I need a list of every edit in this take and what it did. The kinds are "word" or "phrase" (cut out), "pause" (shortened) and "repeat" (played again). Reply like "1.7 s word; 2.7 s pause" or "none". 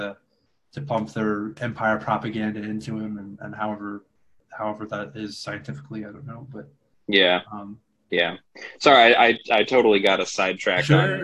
none